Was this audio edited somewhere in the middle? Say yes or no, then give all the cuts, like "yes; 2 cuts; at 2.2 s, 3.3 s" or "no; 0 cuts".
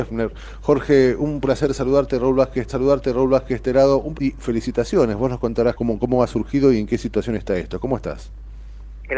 yes; 3 cuts; at 2.7 s, 4.1 s, 5.7 s